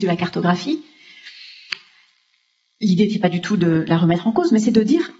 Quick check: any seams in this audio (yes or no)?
no